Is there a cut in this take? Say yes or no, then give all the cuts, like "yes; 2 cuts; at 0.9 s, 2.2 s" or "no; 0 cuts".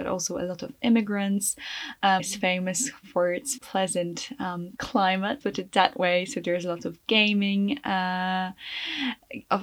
yes; 4 cuts; at 2.2 s, 3.6 s, 4.8 s, 5.4 s